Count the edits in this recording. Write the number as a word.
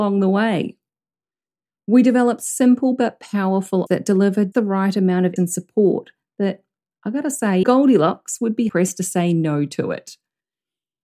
five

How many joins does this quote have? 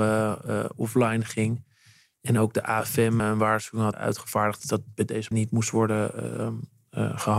four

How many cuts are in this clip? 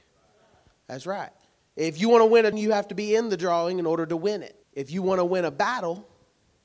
three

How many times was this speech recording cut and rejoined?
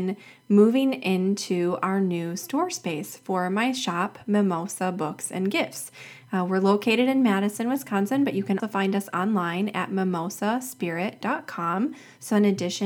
one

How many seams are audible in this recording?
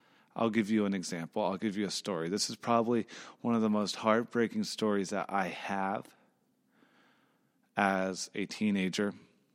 zero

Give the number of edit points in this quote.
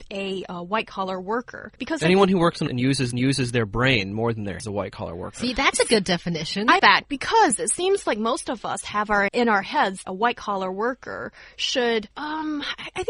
eight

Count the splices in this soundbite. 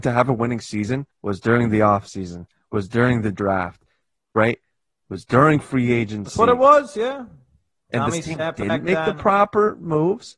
one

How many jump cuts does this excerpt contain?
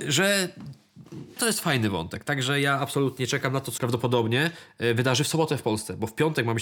two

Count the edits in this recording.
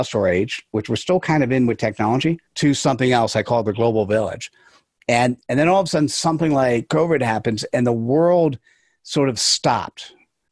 one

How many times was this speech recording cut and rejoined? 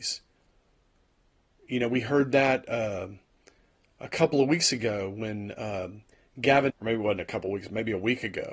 one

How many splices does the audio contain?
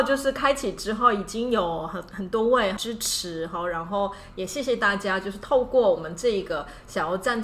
one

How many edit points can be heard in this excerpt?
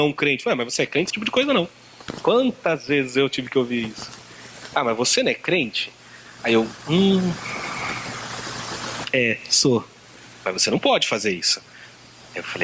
one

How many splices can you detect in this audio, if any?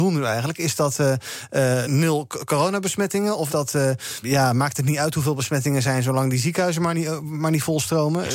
three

